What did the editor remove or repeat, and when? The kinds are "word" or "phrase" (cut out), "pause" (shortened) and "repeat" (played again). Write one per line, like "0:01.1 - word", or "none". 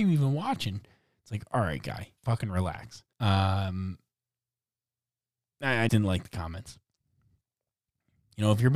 0:02.2 - word
0:03.1 - pause
0:05.9 - word